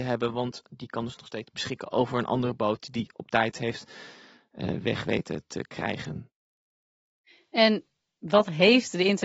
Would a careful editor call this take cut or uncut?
uncut